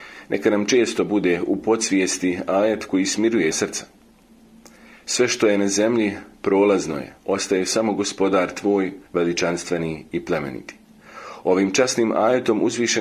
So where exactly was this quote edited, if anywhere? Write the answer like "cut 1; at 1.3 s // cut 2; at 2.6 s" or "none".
cut 1; at 3.5 s // cut 2; at 7.2 s // cut 3; at 9.1 s